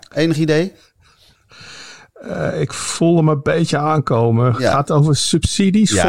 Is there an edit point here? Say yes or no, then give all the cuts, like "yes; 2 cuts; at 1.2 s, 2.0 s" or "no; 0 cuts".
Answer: no; 0 cuts